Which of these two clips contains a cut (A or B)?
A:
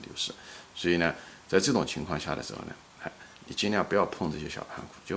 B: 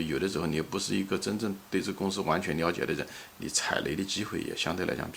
A